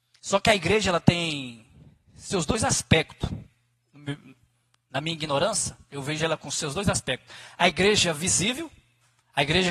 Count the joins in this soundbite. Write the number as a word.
zero